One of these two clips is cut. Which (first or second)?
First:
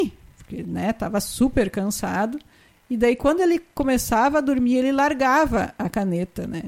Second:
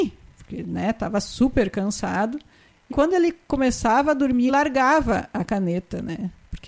second